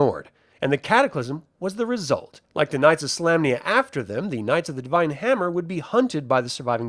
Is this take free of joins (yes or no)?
no